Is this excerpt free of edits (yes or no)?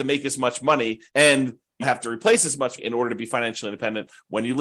no